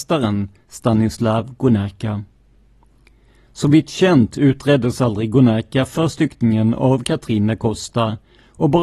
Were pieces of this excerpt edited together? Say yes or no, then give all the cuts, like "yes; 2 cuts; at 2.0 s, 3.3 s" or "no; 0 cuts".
no; 0 cuts